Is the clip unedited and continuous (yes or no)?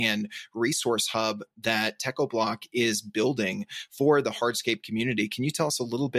yes